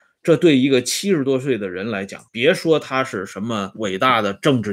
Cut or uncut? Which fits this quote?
cut